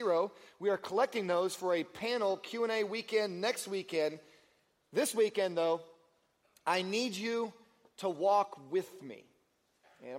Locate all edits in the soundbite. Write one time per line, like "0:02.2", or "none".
none